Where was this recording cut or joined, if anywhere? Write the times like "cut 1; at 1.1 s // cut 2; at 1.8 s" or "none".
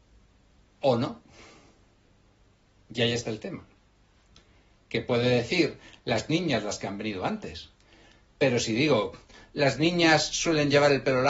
none

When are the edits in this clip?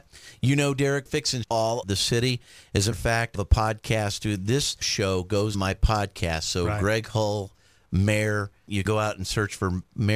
cut 1; at 1.1 s // cut 2; at 1.4 s // cut 3; at 1.8 s // cut 4; at 2.9 s // cut 5; at 3.3 s // cut 6; at 4.8 s // cut 7; at 5.5 s // cut 8; at 8.9 s

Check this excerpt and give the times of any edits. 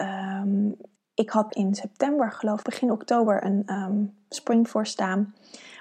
cut 1; at 1.0 s // cut 2; at 1.5 s // cut 3; at 2.6 s // cut 4; at 4.3 s

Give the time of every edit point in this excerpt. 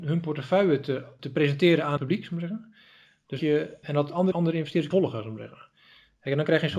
cut 1; at 1.2 s // cut 2; at 2.0 s // cut 3; at 3.4 s // cut 4; at 3.8 s // cut 5; at 4.3 s // cut 6; at 4.9 s

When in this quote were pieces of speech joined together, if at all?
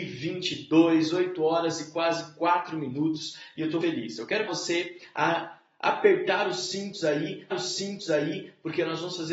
cut 1; at 3.8 s // cut 2; at 4.5 s // cut 3; at 7.5 s

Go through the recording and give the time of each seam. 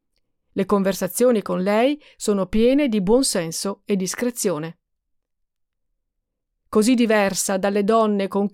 none

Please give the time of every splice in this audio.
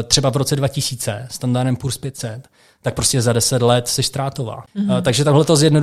none

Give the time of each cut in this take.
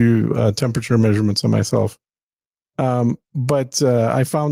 none

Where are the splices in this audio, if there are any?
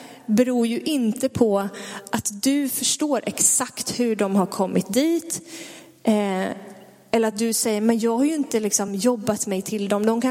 none

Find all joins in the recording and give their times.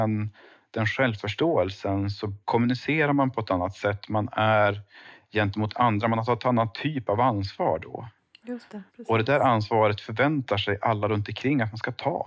cut 1; at 2.4 s // cut 2; at 8.9 s

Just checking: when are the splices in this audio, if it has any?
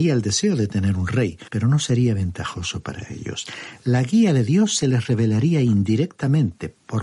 cut 1; at 1.5 s

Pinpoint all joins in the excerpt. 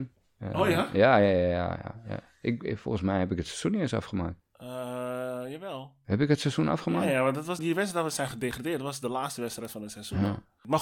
cut 1; at 4.5 s // cut 2; at 7.6 s

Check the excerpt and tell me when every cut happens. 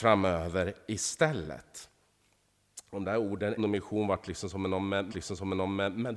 cut 1; at 3.6 s // cut 2; at 5.1 s

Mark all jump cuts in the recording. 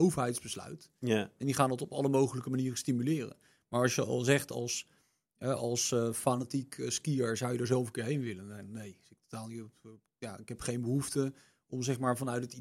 none

